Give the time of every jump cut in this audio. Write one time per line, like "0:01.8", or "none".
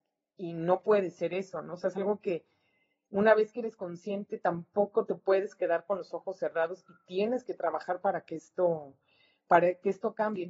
none

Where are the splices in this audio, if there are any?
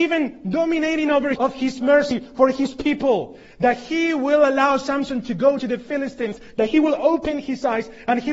0:01.4
0:05.6

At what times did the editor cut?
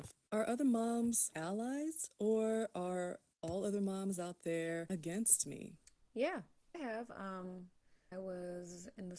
0:01.3
0:06.7
0:08.1

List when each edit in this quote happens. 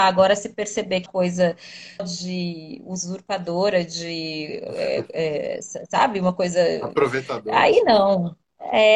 0:01.1
0:02.0

